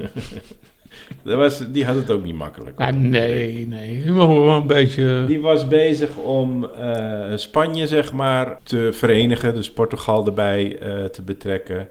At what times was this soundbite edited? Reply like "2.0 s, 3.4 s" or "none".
none